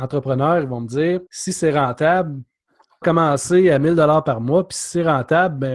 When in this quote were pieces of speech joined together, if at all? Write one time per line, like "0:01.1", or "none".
0:01.3
0:03.0